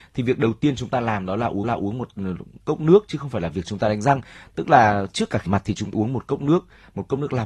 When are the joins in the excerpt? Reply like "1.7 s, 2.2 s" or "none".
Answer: 1.6 s, 5.5 s, 5.9 s